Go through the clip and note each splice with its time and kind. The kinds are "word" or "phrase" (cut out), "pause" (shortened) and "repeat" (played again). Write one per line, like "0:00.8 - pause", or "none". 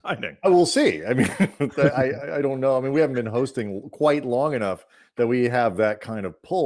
none